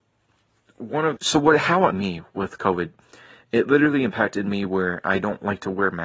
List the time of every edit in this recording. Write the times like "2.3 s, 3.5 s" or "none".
1.2 s, 1.9 s